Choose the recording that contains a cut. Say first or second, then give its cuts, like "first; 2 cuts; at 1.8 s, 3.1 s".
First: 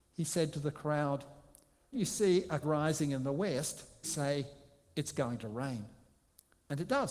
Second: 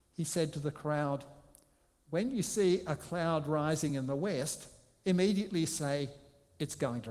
first; 3 cuts; at 1.9 s, 2.6 s, 4.0 s